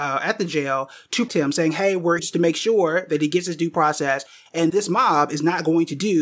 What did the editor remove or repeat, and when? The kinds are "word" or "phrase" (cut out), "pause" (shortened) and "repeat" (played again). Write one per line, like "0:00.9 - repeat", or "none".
0:01.3 - word
0:02.2 - word
0:04.7 - word